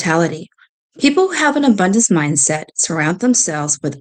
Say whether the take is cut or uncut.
uncut